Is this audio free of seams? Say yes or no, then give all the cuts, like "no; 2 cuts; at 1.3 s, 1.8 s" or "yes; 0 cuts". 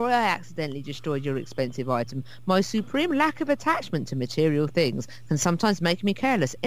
yes; 0 cuts